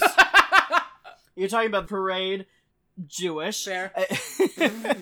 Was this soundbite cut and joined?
yes; 1 cut; at 1.8 s

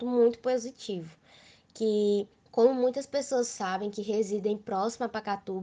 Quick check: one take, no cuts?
no; 1 cut; at 2.4 s

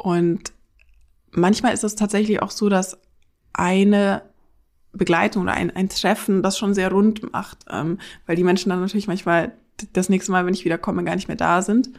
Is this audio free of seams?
yes; 0 cuts

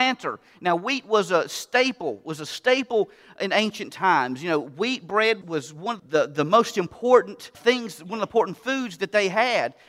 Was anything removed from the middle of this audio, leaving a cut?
yes; 3 cuts; at 5.4 s, 6.0 s, 7.5 s

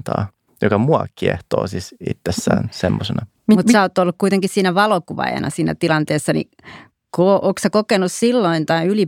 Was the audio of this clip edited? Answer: no; 0 cuts

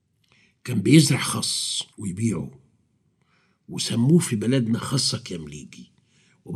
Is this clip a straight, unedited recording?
no; 1 cut; at 1.9 s

